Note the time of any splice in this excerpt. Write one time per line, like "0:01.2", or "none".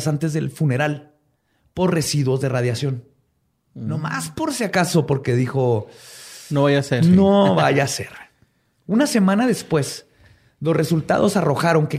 none